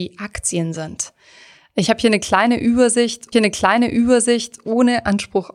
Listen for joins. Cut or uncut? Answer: cut